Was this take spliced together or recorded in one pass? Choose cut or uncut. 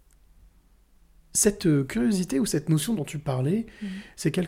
cut